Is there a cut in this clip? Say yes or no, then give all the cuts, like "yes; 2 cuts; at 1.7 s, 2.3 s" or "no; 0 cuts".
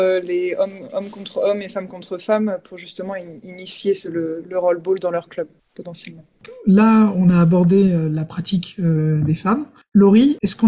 no; 0 cuts